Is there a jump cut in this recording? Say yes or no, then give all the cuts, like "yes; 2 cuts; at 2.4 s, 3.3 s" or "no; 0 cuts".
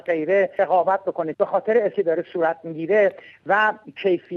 yes; 2 cuts; at 1.3 s, 1.9 s